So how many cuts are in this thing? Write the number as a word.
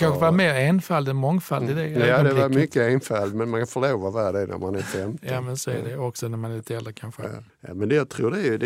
zero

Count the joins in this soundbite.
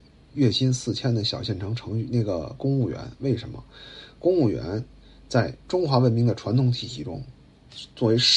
one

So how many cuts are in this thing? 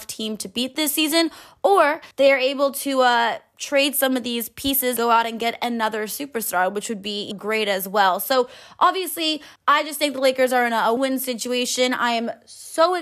five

